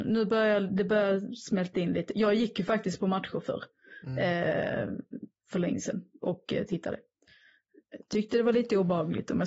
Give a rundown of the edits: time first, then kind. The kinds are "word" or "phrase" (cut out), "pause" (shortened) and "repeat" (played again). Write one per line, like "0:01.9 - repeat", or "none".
none